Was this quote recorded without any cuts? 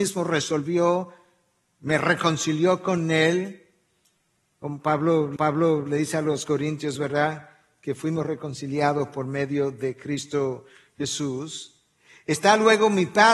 no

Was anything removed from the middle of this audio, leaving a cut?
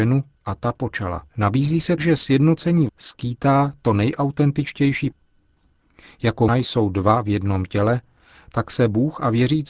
yes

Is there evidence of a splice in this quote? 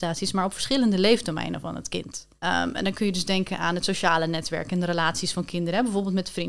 yes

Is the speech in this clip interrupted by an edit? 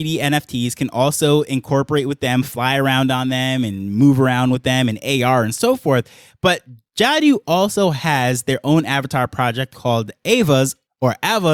no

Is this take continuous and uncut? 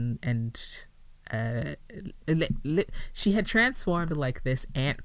no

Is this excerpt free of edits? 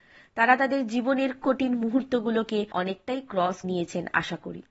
no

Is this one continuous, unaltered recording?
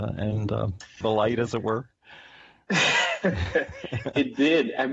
no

